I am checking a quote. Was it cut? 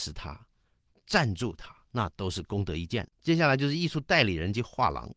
yes; 2 cuts; at 1.8 s, 3.1 s

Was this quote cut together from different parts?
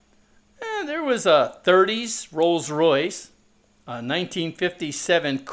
no; 0 cuts

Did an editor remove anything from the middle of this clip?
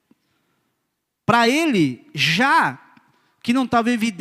no; 0 cuts

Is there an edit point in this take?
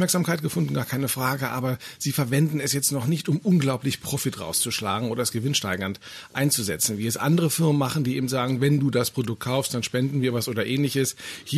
no; 0 cuts

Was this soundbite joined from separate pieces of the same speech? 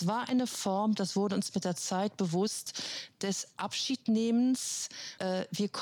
no; 0 cuts

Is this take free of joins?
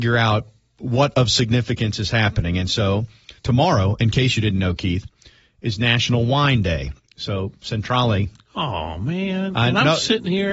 no; 1 cut; at 3.4 s

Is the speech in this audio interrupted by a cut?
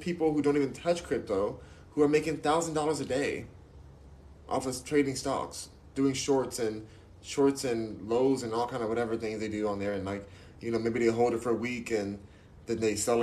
no; 0 cuts

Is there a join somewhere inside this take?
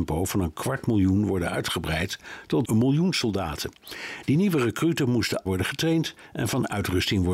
yes; 2 cuts; at 2.6 s, 5.5 s

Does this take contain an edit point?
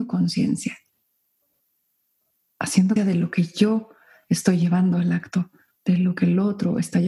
yes; 1 cut; at 3.0 s

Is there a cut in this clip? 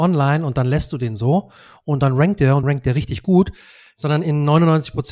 yes; 1 cut; at 2.6 s

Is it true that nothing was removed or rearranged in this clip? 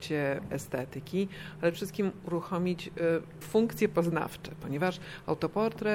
no; 2 cuts; at 1.7 s, 3.4 s

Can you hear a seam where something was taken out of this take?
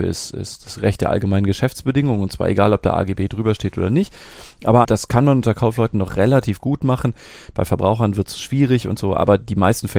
yes; 1 cut; at 4.8 s

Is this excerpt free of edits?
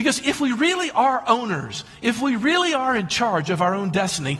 yes; 0 cuts

